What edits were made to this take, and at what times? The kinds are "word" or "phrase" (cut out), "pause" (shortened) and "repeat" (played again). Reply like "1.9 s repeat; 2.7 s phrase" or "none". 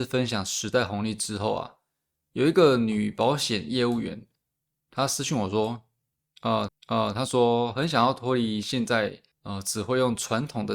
6.7 s repeat; 9.3 s pause

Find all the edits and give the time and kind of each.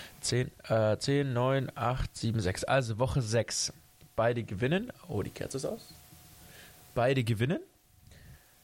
none

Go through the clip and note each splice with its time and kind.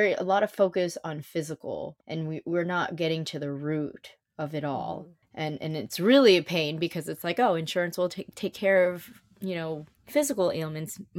2.0 s pause; 5.2 s pause; 10.0 s pause

